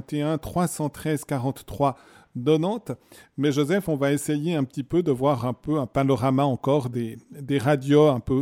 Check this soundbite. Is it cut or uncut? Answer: uncut